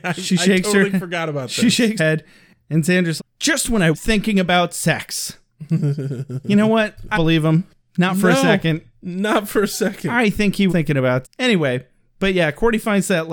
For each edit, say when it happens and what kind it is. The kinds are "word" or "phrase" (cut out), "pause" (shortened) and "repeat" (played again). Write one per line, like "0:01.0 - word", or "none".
0:02.0 - word
0:03.2 - word
0:03.9 - word
0:07.1 - word
0:10.7 - word
0:11.2 - word